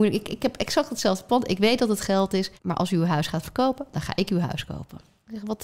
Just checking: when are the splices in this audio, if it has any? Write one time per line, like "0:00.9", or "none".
0:02.6